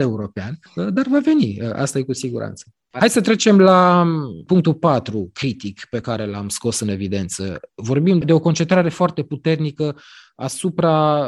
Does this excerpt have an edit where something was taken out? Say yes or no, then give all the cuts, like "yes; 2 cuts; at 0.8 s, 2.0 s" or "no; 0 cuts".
no; 0 cuts